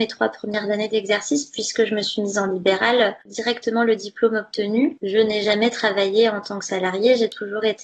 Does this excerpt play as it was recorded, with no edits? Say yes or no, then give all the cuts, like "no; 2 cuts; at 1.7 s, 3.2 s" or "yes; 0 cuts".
yes; 0 cuts